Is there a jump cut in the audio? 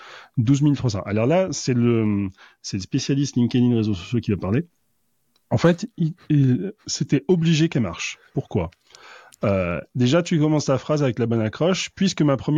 no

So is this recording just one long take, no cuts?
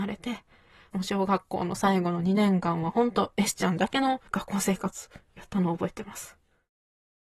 yes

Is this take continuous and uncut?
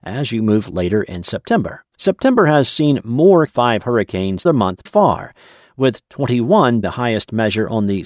no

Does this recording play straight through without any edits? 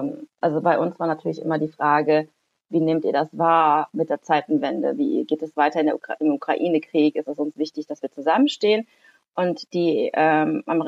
yes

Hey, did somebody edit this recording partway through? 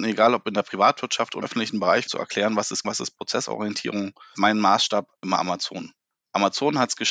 yes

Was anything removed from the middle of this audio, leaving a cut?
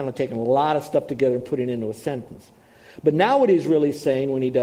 no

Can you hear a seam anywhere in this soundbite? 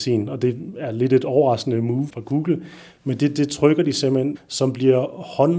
yes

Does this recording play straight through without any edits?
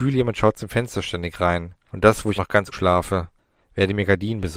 no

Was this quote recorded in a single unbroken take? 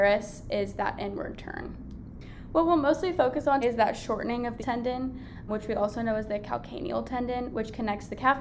no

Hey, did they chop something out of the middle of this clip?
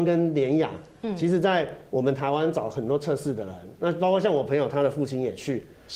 no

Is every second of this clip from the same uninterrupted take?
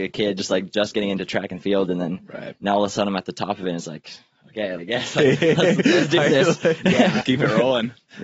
no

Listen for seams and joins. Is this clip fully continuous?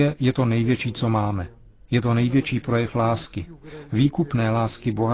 yes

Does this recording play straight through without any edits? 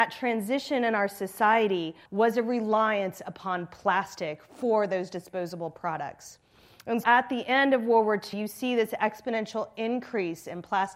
no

